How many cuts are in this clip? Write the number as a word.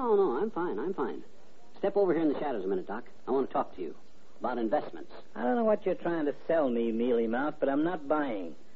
zero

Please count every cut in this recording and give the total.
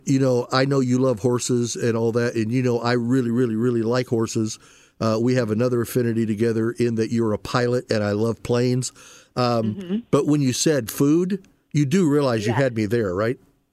zero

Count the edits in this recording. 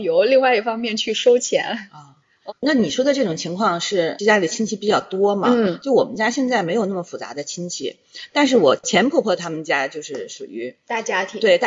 one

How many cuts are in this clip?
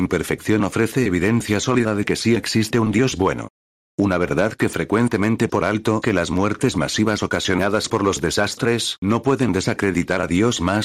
two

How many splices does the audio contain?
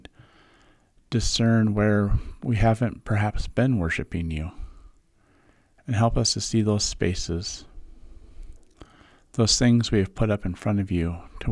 zero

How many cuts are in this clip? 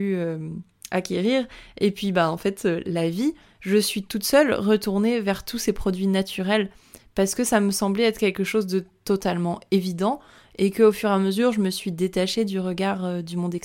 zero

